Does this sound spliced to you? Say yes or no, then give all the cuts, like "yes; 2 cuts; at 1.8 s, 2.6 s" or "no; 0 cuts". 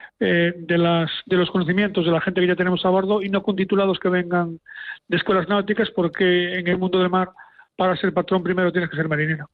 no; 0 cuts